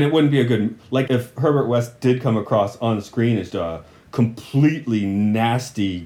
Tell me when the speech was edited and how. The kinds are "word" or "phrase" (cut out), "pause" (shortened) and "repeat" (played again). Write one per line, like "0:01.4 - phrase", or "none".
0:01.1 - word
0:03.5 - word